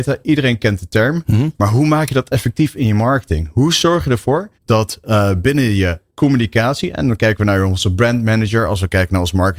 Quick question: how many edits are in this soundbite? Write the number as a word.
one